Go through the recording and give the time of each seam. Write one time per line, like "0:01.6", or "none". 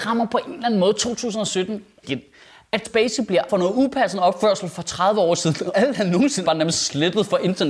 0:02.0
0:02.8
0:03.5
0:05.7
0:06.4